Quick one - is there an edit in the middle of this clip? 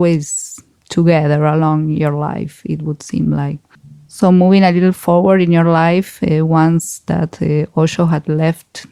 no; 0 cuts

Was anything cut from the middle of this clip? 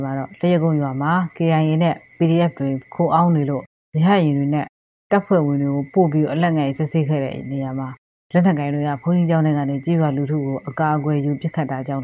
no; 0 cuts

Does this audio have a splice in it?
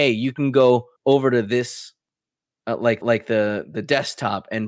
yes; 2 cuts; at 1.0 s, 3.0 s

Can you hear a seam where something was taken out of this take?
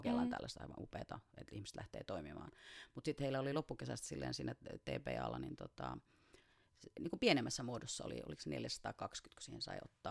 no; 0 cuts

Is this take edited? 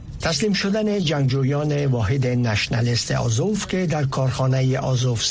no; 0 cuts

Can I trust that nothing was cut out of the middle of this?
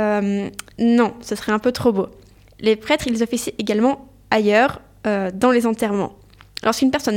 yes; 0 cuts

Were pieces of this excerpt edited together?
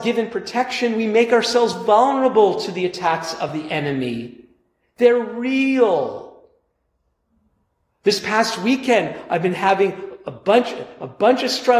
no; 0 cuts

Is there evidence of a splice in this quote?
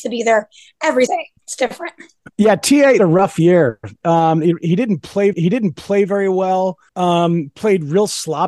yes; 6 cuts; at 1.1 s, 1.4 s, 2.3 s, 3.0 s, 5.3 s, 6.9 s

